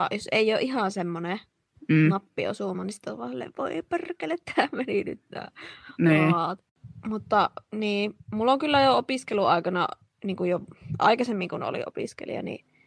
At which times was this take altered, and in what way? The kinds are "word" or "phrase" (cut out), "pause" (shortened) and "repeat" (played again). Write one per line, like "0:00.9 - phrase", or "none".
none